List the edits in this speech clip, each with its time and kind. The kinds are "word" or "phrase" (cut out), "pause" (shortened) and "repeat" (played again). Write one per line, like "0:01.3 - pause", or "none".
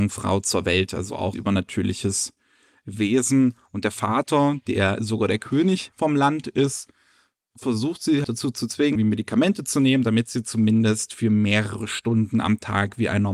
0:01.3 - word
0:08.2 - word
0:09.0 - word